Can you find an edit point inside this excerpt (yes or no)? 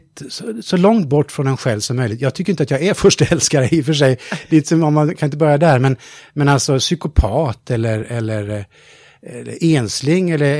no